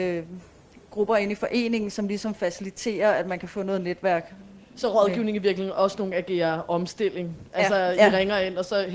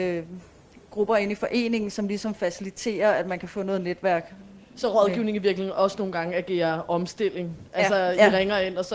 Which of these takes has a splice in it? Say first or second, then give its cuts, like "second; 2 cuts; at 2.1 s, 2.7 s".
first; 1 cut; at 6.1 s